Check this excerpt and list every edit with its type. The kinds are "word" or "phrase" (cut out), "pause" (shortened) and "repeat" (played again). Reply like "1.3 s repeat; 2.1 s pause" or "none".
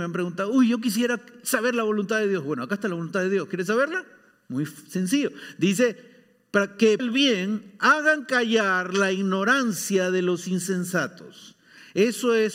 7.0 s word